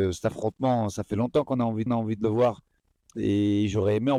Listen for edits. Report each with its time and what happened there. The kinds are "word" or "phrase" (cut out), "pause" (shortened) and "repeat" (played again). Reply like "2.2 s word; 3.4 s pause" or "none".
1.9 s repeat; 2.8 s pause